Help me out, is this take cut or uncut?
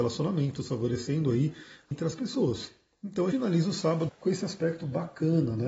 cut